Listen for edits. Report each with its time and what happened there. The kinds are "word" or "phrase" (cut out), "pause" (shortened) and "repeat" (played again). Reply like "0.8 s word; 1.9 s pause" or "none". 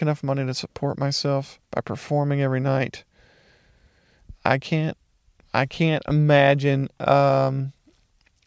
1.6 s pause